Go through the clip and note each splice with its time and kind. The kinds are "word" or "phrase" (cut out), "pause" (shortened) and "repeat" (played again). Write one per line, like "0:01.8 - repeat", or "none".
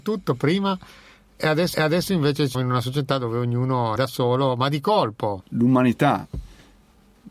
0:01.7 - repeat
0:02.5 - word
0:04.0 - word